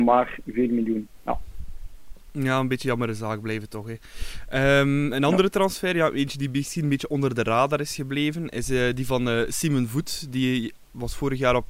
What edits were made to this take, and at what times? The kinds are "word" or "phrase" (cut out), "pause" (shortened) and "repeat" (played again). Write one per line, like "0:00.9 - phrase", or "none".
none